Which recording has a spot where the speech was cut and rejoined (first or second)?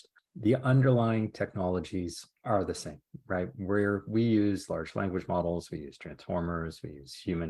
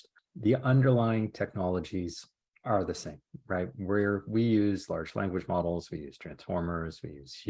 first